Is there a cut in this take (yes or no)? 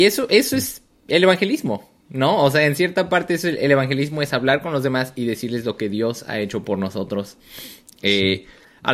no